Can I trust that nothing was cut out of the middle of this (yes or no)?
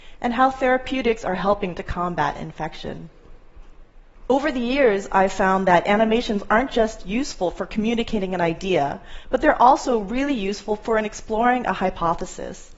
yes